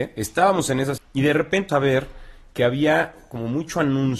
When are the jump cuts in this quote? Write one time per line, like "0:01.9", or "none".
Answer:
0:01.0
0:01.7